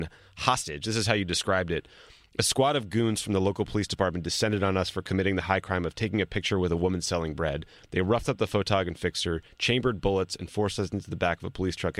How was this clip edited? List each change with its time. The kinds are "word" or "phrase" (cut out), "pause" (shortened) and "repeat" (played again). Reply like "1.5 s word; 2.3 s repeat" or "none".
none